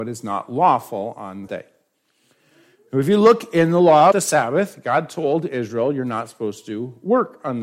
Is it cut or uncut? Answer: cut